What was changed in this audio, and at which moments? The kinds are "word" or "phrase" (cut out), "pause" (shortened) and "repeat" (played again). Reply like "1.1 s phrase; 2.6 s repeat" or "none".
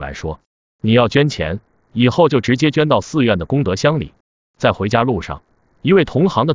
none